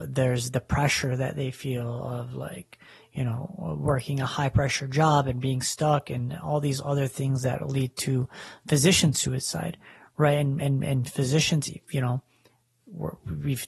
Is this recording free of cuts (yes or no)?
yes